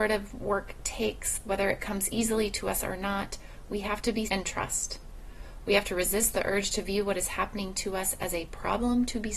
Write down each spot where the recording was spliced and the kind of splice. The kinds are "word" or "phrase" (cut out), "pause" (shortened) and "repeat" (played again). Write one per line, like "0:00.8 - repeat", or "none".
0:04.3 - word